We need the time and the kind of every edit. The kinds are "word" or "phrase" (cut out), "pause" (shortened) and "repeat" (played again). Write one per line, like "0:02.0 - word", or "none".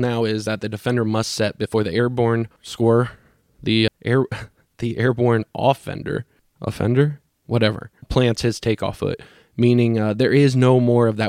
0:03.9 - word
0:08.0 - word